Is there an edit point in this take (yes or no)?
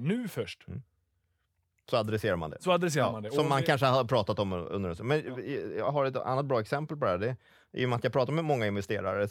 no